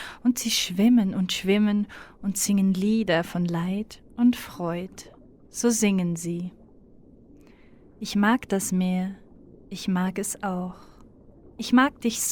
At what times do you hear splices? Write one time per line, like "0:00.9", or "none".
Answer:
none